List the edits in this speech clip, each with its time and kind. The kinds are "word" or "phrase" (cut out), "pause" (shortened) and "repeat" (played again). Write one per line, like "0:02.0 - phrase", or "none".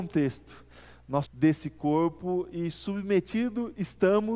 0:01.3 - phrase